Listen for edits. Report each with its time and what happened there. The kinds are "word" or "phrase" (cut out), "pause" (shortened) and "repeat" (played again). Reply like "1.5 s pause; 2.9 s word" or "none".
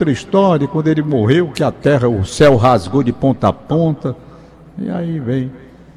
none